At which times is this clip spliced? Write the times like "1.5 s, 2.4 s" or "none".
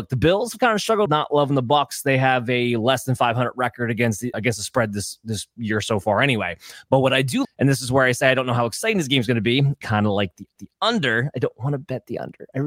1.1 s, 4.3 s, 7.4 s, 9.8 s, 10.6 s